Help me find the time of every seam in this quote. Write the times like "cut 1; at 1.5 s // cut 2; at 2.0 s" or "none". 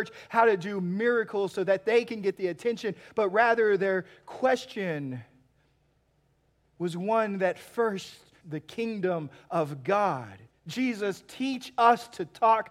cut 1; at 8.4 s // cut 2; at 10.5 s